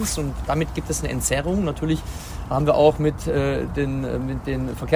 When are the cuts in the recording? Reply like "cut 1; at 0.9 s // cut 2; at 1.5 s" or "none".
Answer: none

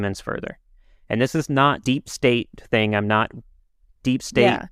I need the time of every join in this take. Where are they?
cut 1; at 1.8 s

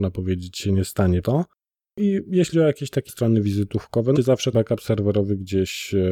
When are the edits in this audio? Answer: cut 1; at 1.2 s // cut 2; at 2.5 s // cut 3; at 3.1 s // cut 4; at 4.2 s // cut 5; at 4.5 s

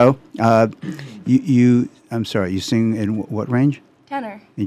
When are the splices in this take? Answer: none

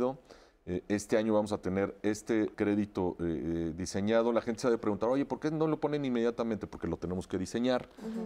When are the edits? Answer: cut 1; at 2.5 s

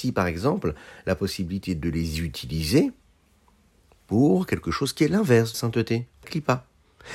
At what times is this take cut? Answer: cut 1; at 5.5 s // cut 2; at 6.2 s

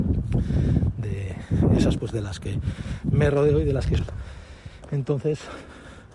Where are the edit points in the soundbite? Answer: cut 1; at 2.0 s // cut 2; at 4.0 s

